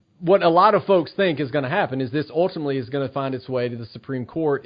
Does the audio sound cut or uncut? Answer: uncut